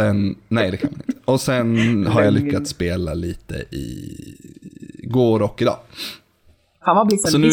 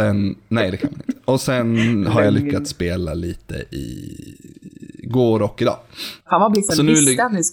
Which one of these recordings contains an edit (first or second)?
second